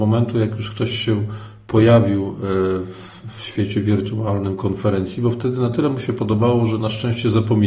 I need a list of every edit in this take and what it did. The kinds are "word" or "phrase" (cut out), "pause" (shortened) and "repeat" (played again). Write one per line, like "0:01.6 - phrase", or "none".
none